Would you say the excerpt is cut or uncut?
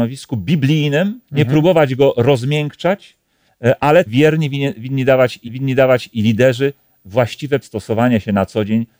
cut